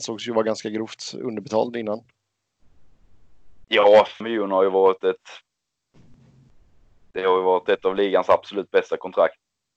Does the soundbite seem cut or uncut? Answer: cut